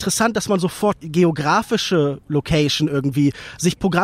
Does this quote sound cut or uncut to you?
cut